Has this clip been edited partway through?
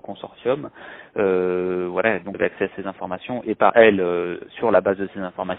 yes; 2 cuts; at 2.3 s, 3.7 s

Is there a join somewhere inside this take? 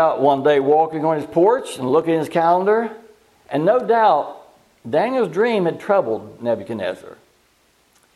no; 0 cuts

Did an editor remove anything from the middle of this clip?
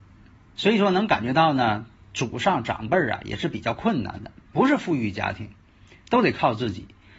no; 0 cuts

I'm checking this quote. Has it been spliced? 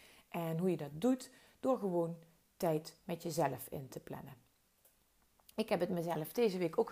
no; 0 cuts

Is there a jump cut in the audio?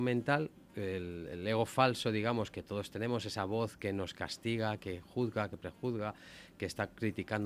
no; 0 cuts

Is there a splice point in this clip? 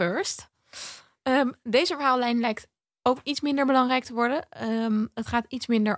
no; 0 cuts

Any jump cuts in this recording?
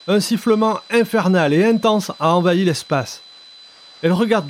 no; 0 cuts

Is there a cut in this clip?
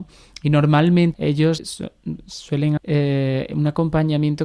yes; 3 cuts; at 1.1 s, 1.6 s, 2.8 s

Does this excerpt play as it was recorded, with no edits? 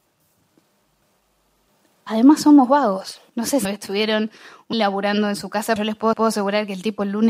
no; 5 cuts; at 3.3 s, 3.6 s, 4.7 s, 5.8 s, 6.1 s

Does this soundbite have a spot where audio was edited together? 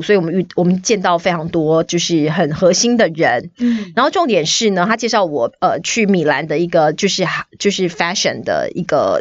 no; 0 cuts

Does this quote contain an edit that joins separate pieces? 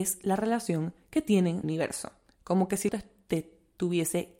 yes; 2 cuts; at 1.6 s, 2.9 s

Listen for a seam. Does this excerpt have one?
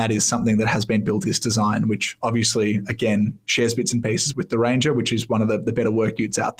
yes; 2 cuts; at 1.2 s, 4.3 s

